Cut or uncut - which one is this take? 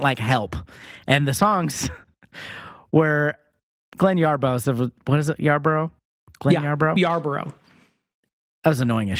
uncut